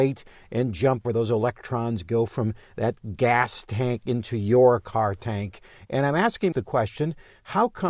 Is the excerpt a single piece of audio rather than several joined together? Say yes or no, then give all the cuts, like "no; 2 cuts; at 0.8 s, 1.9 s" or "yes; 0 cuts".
no; 2 cuts; at 1.0 s, 6.5 s